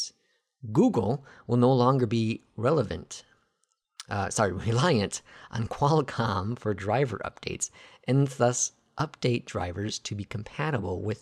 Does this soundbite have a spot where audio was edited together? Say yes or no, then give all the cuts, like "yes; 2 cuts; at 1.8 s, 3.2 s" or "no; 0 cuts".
no; 0 cuts